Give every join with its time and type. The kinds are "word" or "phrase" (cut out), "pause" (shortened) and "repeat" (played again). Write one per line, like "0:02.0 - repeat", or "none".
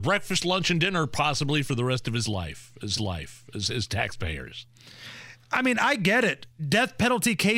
0:03.0 - repeat